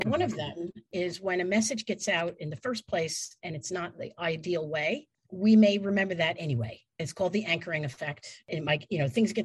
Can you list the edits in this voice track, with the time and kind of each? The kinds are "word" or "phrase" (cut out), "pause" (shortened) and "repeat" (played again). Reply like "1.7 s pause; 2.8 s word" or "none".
none